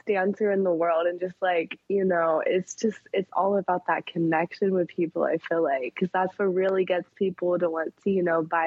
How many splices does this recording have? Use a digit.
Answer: 0